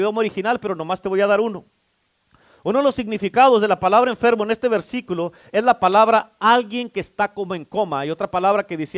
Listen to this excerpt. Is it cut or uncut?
uncut